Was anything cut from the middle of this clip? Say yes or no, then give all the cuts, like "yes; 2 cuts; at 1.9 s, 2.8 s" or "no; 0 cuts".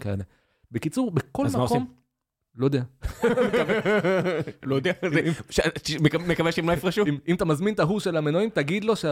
no; 0 cuts